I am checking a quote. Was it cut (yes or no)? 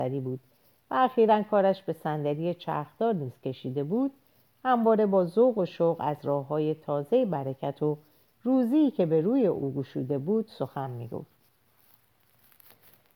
no